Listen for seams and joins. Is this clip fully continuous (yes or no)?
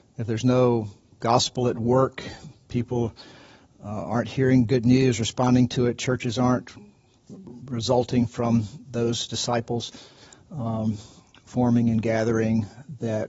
yes